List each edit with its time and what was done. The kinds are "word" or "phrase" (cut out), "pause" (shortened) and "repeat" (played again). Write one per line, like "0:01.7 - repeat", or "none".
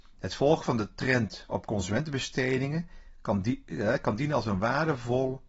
none